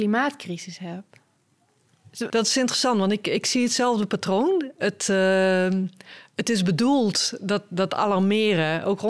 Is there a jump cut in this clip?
no; 0 cuts

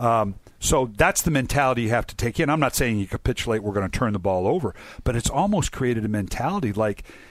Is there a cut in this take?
no; 0 cuts

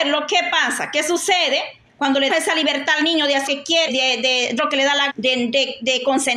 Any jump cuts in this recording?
yes; 5 cuts; at 2.3 s, 3.5 s, 3.9 s, 4.6 s, 5.1 s

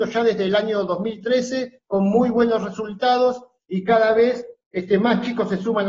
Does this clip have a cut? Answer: no; 0 cuts

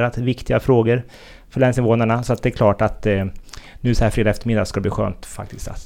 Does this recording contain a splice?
no; 0 cuts

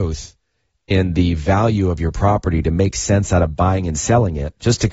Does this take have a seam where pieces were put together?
no; 0 cuts

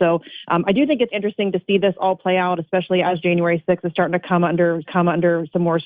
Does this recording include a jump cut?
yes; 2 cuts; at 1.1 s, 4.9 s

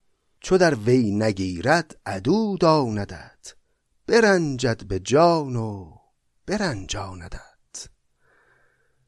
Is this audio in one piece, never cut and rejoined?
yes; 0 cuts

